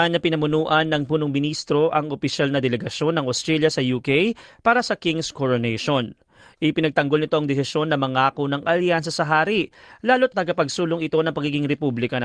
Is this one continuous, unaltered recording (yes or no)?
no